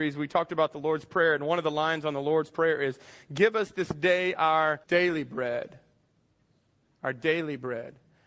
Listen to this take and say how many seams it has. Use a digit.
1